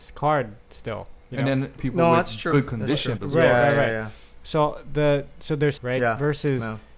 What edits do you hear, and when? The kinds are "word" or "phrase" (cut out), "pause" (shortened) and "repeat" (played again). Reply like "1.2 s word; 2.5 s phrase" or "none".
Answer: 1.8 s word; 3.2 s word; 5.8 s word